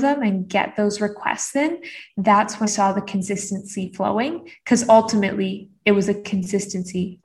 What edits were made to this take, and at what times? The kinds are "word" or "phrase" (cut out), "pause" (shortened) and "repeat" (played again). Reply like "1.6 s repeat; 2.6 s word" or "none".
2.7 s word